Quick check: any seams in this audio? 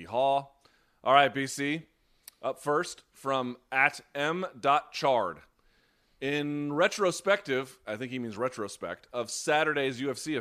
no; 0 cuts

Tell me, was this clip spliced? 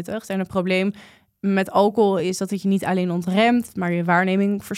no; 0 cuts

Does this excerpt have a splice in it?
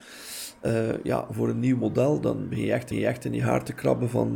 yes; 2 cuts; at 2.5 s, 2.9 s

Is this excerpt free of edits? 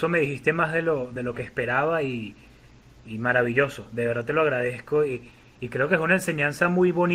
yes; 0 cuts

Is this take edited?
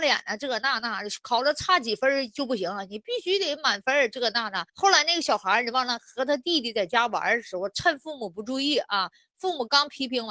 yes; 1 cut; at 4.7 s

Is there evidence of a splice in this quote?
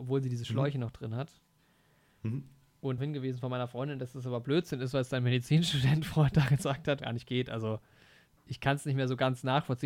yes; 2 cuts; at 3.0 s, 7.0 s

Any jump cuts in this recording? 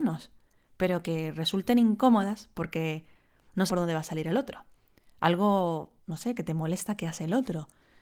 yes; 2 cuts; at 3.7 s, 6.0 s

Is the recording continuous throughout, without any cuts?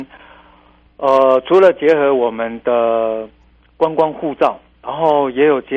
no; 1 cut; at 4.7 s

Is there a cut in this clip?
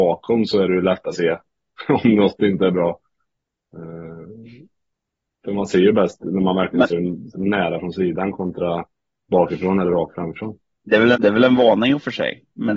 yes; 5 cuts; at 1.1 s, 6.9 s, 7.3 s, 9.3 s, 11.1 s

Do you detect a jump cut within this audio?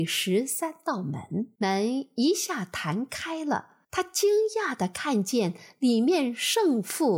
yes; 2 cuts; at 1.5 s, 3.8 s

